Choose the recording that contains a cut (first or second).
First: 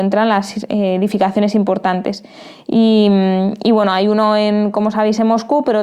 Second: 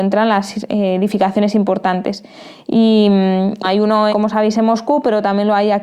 second